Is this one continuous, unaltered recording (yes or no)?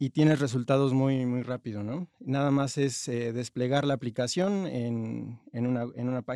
yes